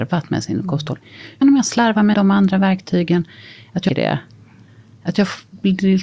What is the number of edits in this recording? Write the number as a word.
three